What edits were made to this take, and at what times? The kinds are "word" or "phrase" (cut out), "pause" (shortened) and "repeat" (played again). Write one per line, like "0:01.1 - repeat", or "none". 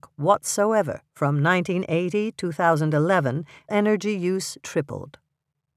0:01.1 - pause
0:02.3 - word
0:03.7 - word
0:04.6 - word